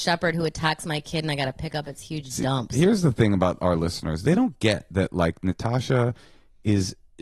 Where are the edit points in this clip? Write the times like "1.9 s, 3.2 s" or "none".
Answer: none

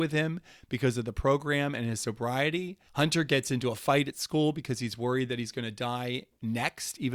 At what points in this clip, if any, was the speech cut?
2.9 s

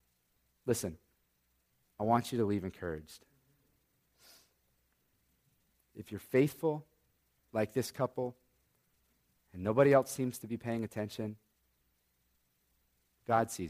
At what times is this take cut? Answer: none

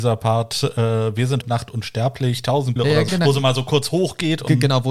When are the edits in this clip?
1.4 s, 2.8 s, 3.1 s

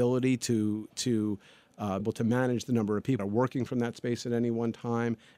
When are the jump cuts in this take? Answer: 2.0 s, 3.2 s

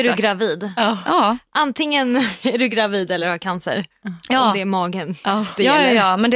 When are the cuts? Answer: none

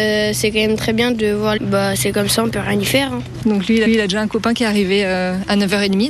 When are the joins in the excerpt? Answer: 1.6 s, 3.9 s

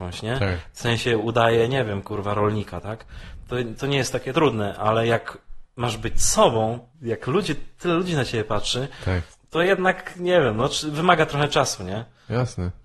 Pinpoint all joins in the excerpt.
6.9 s, 9.3 s

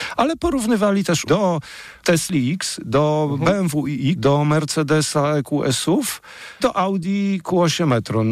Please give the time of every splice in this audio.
1.3 s, 2.0 s, 4.1 s, 6.6 s

